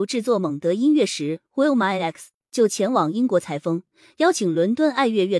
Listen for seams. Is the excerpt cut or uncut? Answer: uncut